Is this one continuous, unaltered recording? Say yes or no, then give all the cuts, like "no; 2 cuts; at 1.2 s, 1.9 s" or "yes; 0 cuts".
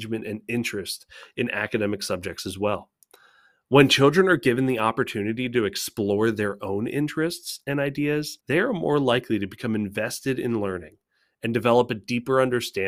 no; 1 cut; at 8.4 s